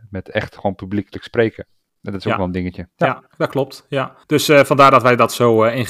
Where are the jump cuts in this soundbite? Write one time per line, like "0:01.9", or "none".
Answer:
0:02.9
0:03.3
0:04.2